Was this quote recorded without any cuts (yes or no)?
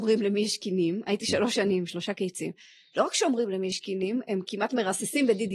yes